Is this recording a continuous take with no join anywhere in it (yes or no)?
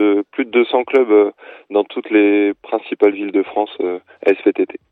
yes